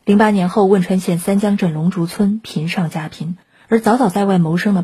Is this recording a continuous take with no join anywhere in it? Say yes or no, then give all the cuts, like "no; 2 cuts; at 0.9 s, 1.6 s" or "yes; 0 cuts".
yes; 0 cuts